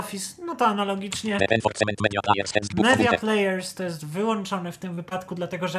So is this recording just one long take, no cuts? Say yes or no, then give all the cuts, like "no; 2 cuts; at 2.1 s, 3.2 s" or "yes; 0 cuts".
yes; 0 cuts